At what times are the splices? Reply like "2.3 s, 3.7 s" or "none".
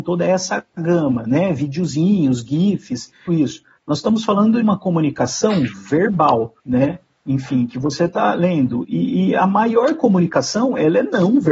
3.3 s, 4.6 s, 6.6 s